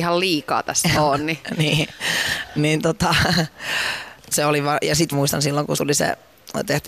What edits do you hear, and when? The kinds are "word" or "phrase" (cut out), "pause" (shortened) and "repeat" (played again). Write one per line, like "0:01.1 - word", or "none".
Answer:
0:00.9 - word
0:02.6 - word
0:04.3 - word
0:05.1 - phrase
0:05.8 - word